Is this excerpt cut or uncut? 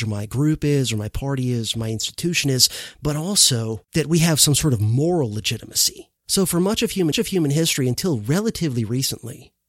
cut